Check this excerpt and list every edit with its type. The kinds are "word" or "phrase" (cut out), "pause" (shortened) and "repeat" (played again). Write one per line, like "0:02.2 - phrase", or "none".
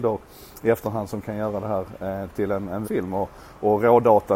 0:02.8 - word